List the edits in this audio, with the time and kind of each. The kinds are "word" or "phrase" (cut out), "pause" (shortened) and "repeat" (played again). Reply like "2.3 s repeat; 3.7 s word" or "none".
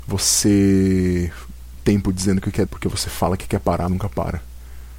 1.8 s word; 2.6 s word; 3.9 s word